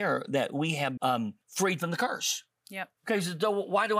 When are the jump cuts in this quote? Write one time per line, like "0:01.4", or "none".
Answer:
0:01.0
0:01.4
0:03.0